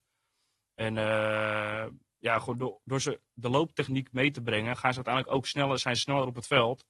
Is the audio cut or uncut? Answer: uncut